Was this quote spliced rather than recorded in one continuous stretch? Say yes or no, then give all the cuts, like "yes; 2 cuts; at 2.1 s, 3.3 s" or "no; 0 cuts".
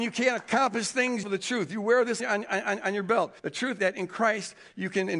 yes; 4 cuts; at 1.2 s, 2.2 s, 3.4 s, 3.8 s